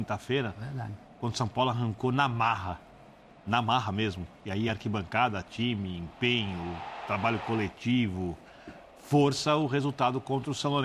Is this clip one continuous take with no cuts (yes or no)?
yes